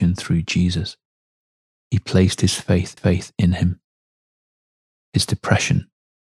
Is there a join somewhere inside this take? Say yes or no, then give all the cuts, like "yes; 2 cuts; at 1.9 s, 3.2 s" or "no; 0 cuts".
yes; 1 cut; at 3.0 s